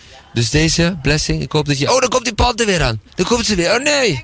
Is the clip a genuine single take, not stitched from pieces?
no; 2 cuts; at 1.9 s, 3.1 s

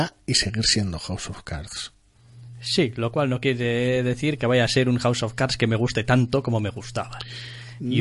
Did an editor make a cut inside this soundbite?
no; 0 cuts

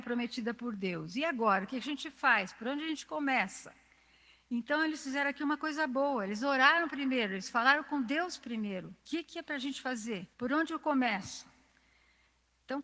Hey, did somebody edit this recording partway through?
yes; 2 cuts; at 9.0 s, 10.3 s

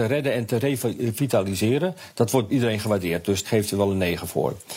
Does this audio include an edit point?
yes; 2 cuts; at 2.5 s, 3.4 s

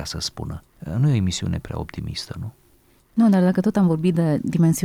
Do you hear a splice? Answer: no; 0 cuts

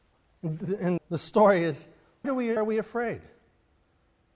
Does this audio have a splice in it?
yes; 3 cuts; at 1.0 s, 2.2 s, 2.6 s

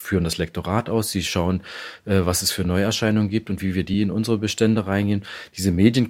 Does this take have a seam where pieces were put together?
no; 0 cuts

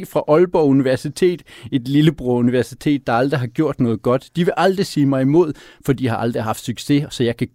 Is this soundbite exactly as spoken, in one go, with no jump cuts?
yes; 0 cuts

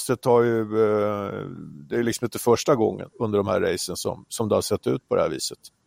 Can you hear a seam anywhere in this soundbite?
yes; 1 cut; at 3.1 s

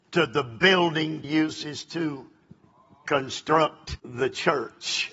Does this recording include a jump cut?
yes; 2 cuts; at 1.2 s, 4.0 s

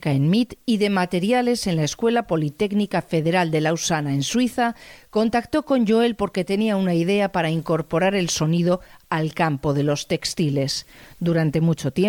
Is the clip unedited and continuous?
yes; 0 cuts

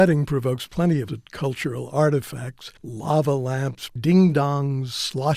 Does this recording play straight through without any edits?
no; 3 cuts; at 1.1 s, 2.8 s, 4.0 s

